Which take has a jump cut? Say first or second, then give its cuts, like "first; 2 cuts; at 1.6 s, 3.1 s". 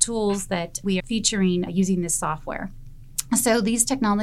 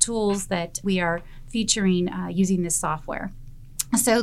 first; 2 cuts; at 1.0 s, 1.7 s